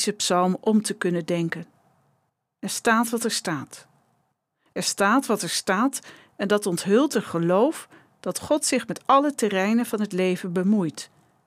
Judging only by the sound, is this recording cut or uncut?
uncut